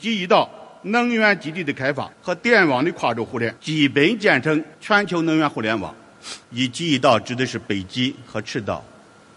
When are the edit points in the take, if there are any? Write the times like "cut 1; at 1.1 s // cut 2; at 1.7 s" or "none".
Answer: cut 1; at 2.1 s // cut 2; at 3.6 s // cut 3; at 4.7 s // cut 4; at 6.4 s

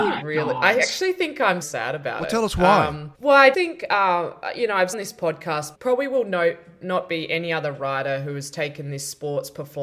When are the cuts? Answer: cut 1; at 1.6 s // cut 2; at 3.1 s // cut 3; at 3.5 s // cut 4; at 4.9 s // cut 5; at 5.7 s

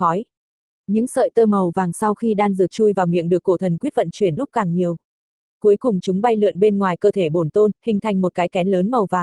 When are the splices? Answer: cut 1; at 4.4 s

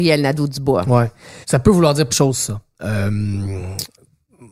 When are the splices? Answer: cut 1; at 1.4 s // cut 2; at 2.1 s

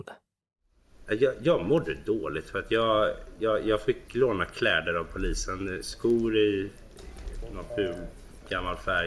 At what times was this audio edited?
none

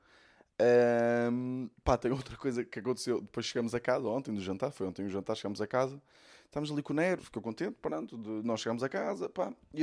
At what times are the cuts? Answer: cut 1; at 7.2 s

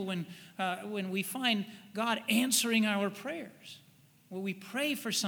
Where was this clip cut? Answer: cut 1; at 4.0 s

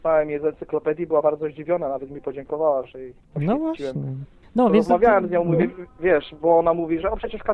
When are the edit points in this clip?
cut 1; at 3.2 s // cut 2; at 4.4 s

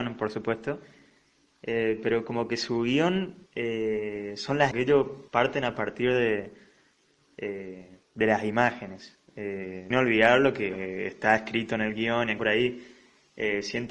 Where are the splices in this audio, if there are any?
cut 1; at 3.5 s // cut 2; at 4.7 s // cut 3; at 5.3 s // cut 4; at 8.0 s // cut 5; at 9.9 s // cut 6; at 10.7 s // cut 7; at 12.4 s

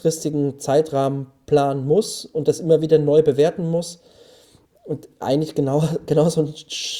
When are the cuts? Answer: none

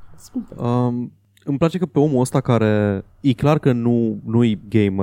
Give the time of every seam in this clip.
cut 1; at 3.1 s

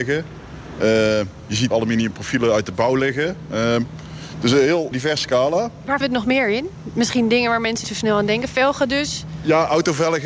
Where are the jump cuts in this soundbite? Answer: cut 1; at 1.7 s // cut 2; at 4.9 s // cut 3; at 6.0 s // cut 4; at 7.8 s

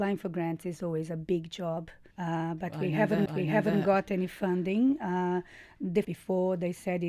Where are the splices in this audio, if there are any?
cut 1; at 2.1 s // cut 2; at 3.3 s // cut 3; at 6.0 s

